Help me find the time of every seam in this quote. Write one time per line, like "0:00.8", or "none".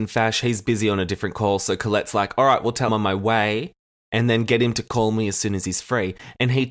0:02.9

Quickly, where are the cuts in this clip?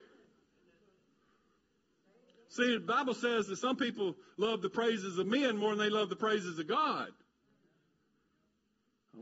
none

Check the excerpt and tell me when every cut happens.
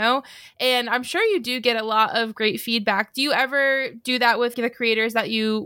0:04.5

